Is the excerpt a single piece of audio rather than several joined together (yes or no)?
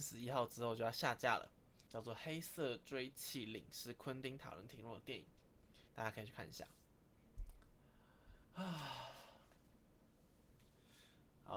no